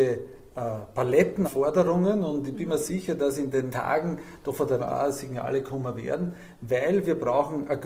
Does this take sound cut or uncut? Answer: cut